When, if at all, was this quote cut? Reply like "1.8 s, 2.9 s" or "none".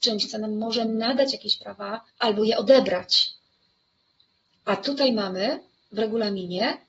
2.1 s